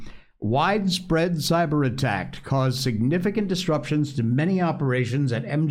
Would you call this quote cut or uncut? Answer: uncut